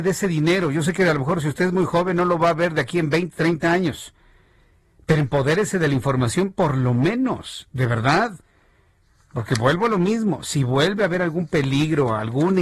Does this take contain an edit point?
no; 0 cuts

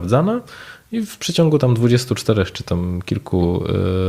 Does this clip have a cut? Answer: no; 0 cuts

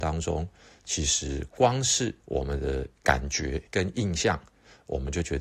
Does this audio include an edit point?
yes; 3 cuts; at 2.2 s, 2.9 s, 3.7 s

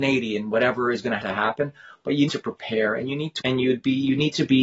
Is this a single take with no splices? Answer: no; 3 cuts; at 1.2 s, 2.3 s, 3.4 s

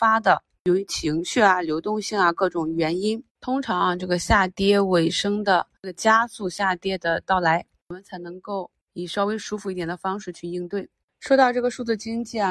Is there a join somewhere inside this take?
no; 0 cuts

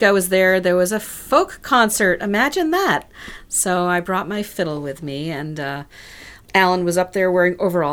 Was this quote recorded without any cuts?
no; 1 cut; at 6.5 s

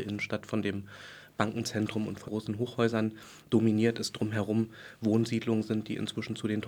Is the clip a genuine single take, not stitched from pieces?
no; 1 cut; at 2.3 s

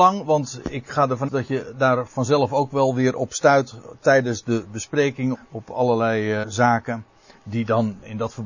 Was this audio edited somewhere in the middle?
yes; 3 cuts; at 1.3 s, 5.3 s, 6.4 s

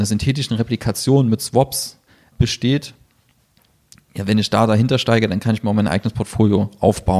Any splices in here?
no; 0 cuts

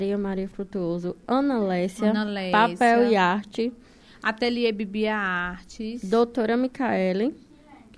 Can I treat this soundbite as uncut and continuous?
yes; 0 cuts

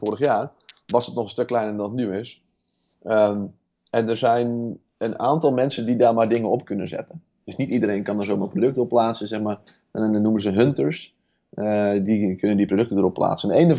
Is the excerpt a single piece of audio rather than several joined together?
yes; 0 cuts

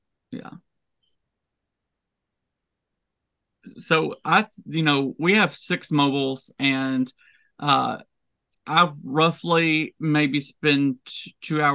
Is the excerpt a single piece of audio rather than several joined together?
yes; 0 cuts

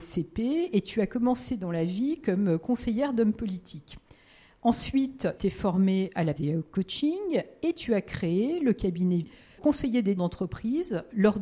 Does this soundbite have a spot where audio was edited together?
yes; 5 cuts; at 5.4 s, 6.4 s, 9.2 s, 9.6 s, 10.2 s

